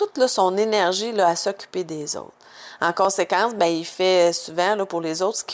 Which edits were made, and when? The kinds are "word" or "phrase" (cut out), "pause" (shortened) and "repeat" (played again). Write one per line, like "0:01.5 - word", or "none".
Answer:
none